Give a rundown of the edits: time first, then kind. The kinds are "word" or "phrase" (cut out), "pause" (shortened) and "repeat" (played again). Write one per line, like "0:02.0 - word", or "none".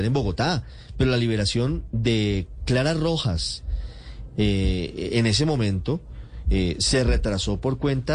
none